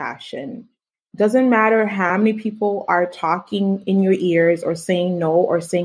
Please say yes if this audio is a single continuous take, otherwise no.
yes